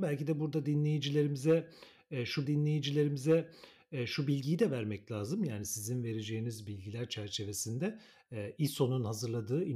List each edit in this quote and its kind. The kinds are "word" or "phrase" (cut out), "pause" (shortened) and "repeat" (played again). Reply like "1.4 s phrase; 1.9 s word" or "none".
2.4 s repeat